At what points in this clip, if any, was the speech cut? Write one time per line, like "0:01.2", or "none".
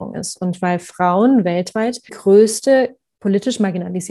0:02.1